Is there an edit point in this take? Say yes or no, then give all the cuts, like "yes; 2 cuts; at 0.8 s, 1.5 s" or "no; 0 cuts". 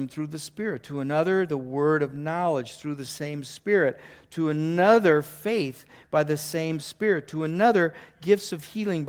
no; 0 cuts